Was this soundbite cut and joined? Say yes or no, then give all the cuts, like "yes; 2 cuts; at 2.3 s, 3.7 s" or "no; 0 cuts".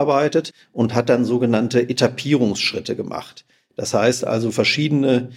no; 0 cuts